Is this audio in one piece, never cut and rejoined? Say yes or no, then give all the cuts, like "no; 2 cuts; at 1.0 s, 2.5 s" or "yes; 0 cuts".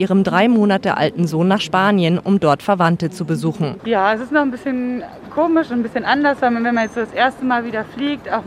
yes; 0 cuts